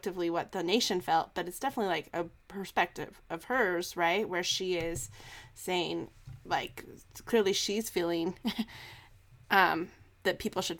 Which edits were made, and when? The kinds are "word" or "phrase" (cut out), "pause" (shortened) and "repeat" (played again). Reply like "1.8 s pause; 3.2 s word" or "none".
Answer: none